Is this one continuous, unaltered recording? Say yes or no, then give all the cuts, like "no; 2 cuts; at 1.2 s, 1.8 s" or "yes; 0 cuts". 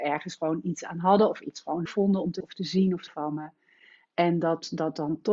no; 3 cuts; at 1.9 s, 2.4 s, 3.1 s